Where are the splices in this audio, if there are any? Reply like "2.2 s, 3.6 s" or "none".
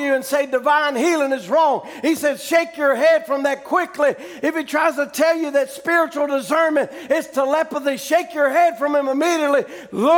none